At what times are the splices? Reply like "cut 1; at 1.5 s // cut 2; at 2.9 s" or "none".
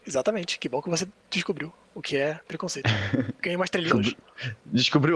cut 1; at 3.9 s